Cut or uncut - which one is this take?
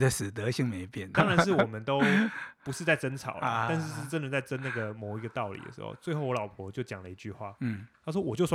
cut